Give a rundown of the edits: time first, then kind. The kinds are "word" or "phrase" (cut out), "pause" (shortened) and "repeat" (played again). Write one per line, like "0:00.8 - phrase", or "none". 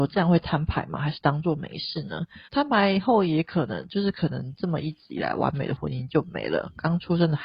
0:02.5 - pause

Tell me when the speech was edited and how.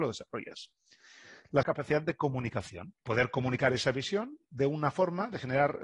0:01.6 - phrase
0:03.0 - pause

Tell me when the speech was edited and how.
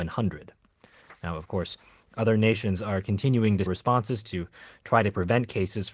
0:03.7 - phrase

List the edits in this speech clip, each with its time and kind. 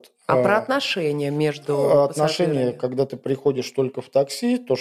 none

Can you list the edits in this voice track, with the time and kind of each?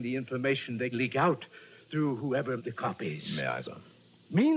0:00.9 - word
0:02.6 - word
0:03.6 - word

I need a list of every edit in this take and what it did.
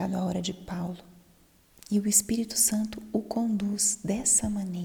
none

